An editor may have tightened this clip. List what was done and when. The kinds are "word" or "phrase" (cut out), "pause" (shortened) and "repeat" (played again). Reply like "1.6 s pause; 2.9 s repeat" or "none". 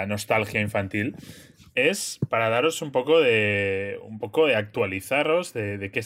none